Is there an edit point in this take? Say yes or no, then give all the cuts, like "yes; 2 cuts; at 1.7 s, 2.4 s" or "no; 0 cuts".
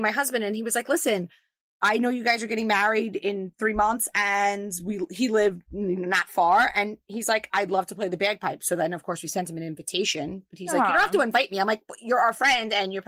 no; 0 cuts